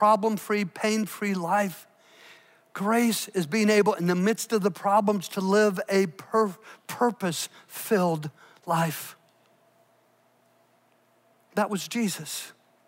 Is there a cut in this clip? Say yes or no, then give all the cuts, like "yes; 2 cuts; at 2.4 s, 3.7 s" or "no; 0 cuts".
no; 0 cuts